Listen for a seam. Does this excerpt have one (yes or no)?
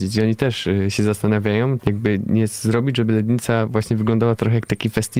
yes